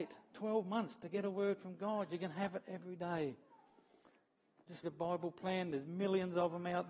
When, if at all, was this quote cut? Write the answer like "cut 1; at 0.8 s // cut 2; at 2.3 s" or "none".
cut 1; at 4.8 s